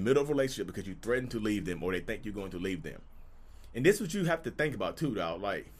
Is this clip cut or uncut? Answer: uncut